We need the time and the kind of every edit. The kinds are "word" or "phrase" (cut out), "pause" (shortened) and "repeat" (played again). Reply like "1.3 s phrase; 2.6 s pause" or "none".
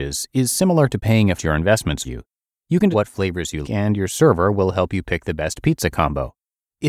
1.4 s phrase; 2.0 s word; 2.9 s word; 3.6 s word